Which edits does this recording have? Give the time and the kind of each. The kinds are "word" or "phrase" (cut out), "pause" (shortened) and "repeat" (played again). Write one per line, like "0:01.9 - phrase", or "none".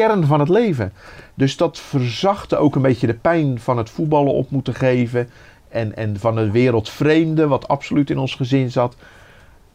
none